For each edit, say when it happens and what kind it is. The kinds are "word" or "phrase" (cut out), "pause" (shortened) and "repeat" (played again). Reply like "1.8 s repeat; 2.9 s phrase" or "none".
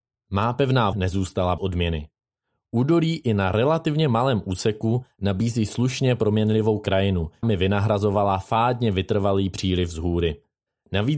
0.9 s word; 1.6 s word; 7.4 s word